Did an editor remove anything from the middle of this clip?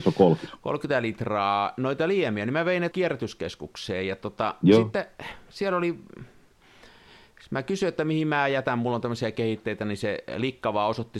yes; 1 cut; at 2.9 s

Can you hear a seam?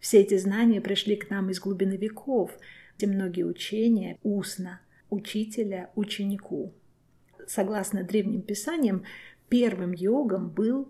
yes; 3 cuts; at 3.0 s, 4.2 s, 5.0 s

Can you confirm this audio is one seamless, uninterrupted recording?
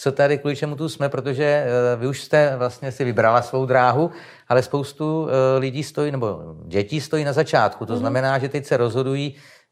yes; 0 cuts

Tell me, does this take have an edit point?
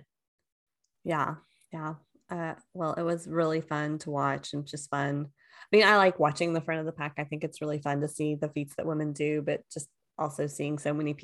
no; 0 cuts

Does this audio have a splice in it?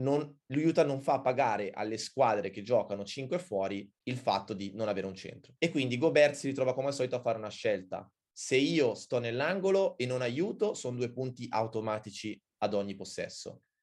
yes; 2 cuts; at 4.0 s, 5.6 s

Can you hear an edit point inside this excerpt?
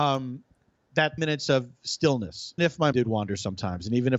yes; 3 cuts; at 1.2 s, 2.6 s, 2.9 s

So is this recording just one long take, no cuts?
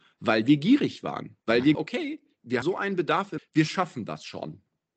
no; 4 cuts; at 1.4 s, 1.7 s, 2.6 s, 3.4 s

